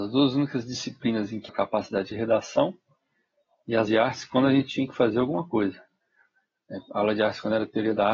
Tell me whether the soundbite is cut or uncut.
cut